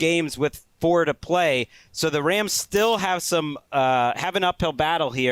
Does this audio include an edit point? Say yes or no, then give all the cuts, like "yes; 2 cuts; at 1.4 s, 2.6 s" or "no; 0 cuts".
no; 0 cuts